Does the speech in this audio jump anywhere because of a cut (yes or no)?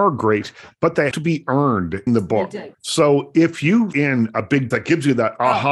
yes